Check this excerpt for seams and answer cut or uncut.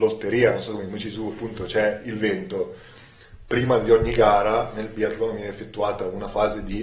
uncut